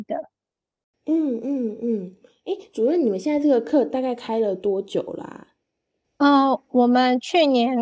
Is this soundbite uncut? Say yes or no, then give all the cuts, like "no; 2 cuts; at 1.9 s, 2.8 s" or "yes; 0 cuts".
yes; 0 cuts